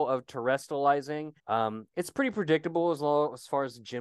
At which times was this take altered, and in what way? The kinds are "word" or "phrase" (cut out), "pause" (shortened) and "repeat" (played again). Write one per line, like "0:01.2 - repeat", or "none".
0:01.4 - pause

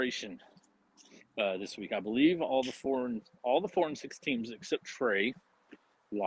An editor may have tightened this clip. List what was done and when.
0:01.2 - pause

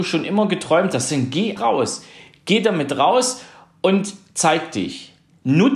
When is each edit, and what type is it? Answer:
0:01.6 - word

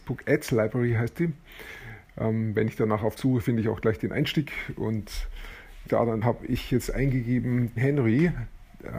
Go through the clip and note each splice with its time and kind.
0:03.2 - word
0:05.9 - word
0:06.2 - phrase
0:07.8 - word

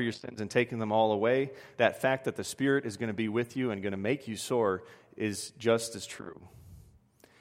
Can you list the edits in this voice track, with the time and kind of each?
none

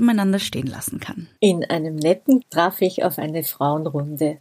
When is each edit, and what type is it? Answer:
0:01.4 - pause
0:02.4 - phrase

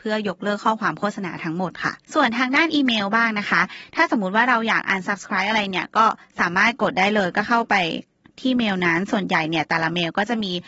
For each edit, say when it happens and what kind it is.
0:02.0 - pause

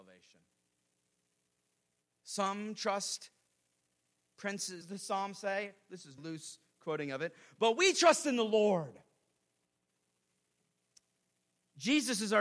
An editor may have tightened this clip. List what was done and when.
0:04.8 - phrase
0:06.2 - word

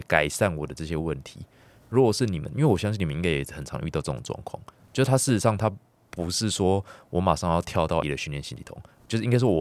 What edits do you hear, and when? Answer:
0:08.0 - word

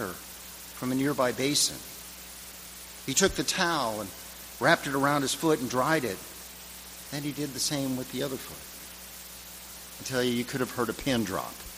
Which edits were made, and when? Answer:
none

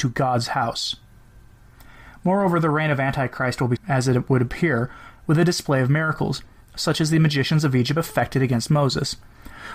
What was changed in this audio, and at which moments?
0:03.8 - word

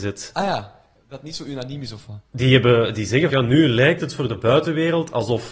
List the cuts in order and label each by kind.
0:02.3 - pause
0:03.3 - phrase

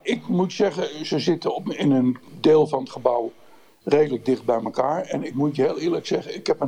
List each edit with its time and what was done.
none

